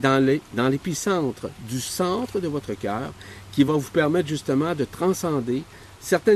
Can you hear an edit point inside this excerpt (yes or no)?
no